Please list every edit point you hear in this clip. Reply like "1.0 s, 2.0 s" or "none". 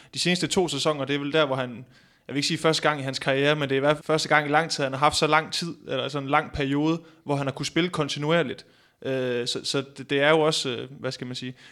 4.0 s